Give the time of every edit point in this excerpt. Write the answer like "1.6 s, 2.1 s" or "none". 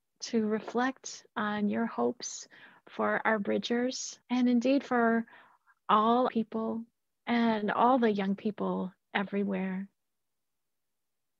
4.2 s, 6.3 s, 7.1 s